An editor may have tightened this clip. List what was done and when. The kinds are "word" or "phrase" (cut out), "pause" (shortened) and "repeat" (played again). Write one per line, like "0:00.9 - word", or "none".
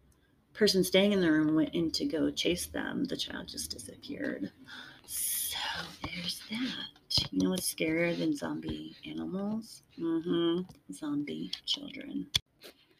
0:05.0 - pause
0:09.9 - pause